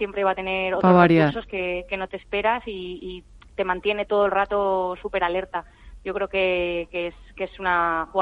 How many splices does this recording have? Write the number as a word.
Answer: zero